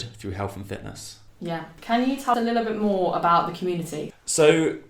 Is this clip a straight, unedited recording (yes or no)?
no